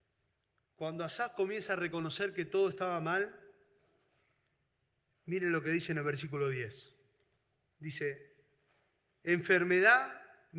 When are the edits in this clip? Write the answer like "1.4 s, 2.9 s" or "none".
none